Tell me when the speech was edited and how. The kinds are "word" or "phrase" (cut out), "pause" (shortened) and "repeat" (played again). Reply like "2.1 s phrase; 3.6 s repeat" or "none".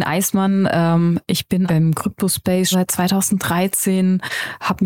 1.7 s word; 2.7 s word